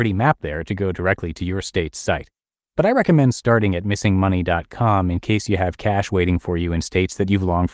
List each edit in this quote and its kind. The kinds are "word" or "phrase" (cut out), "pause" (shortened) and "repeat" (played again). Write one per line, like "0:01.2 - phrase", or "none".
none